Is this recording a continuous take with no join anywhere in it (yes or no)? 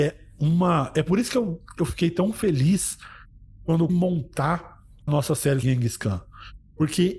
no